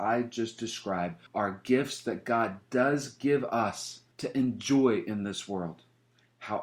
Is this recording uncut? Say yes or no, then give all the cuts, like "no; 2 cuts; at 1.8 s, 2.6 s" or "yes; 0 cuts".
no; 2 cuts; at 1.3 s, 4.1 s